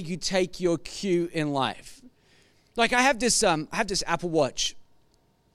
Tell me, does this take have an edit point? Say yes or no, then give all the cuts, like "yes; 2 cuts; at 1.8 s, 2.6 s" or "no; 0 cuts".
no; 0 cuts